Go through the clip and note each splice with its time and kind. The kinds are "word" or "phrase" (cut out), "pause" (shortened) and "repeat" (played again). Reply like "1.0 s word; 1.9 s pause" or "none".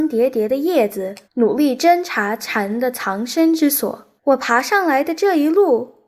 1.2 s pause; 4.2 s pause